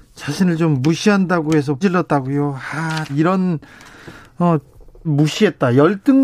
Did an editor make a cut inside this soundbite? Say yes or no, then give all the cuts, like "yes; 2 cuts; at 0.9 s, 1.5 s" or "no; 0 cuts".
yes; 3 cuts; at 1.8 s, 3.1 s, 5.0 s